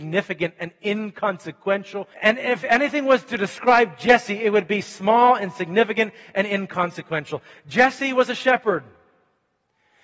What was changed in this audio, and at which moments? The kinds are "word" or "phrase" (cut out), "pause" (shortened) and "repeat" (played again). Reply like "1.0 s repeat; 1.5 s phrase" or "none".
2.1 s pause